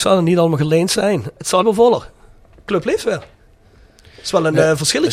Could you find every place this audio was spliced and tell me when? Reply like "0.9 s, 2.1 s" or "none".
1.6 s